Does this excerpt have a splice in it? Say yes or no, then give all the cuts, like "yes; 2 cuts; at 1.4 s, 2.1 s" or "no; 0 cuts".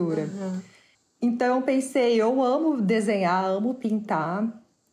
yes; 1 cut; at 0.9 s